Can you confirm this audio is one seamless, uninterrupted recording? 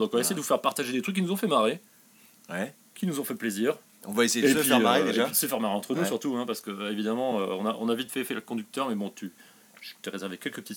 yes; 0 cuts

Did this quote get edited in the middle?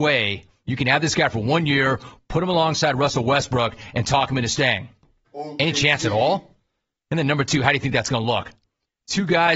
no; 0 cuts

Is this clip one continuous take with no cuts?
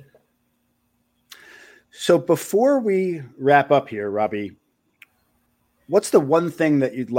yes; 0 cuts

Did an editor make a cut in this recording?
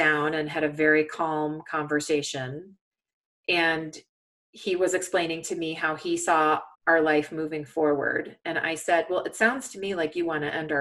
yes; 1 cut; at 6.7 s

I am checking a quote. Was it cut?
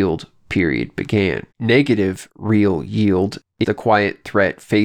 yes; 2 cuts; at 1.5 s, 3.6 s

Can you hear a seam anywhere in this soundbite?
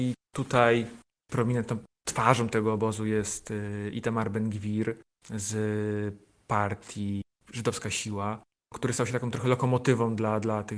no; 0 cuts

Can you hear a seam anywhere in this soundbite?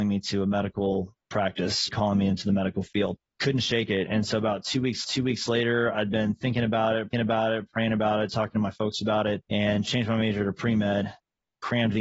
yes; 5 cuts; at 1.9 s, 3.3 s, 5.0 s, 7.1 s, 9.4 s

